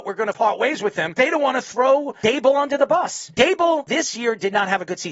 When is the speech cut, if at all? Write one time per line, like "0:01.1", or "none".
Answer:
0:01.2